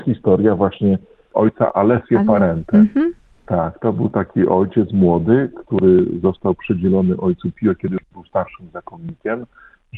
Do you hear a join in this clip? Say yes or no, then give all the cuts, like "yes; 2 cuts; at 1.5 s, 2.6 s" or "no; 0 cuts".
no; 0 cuts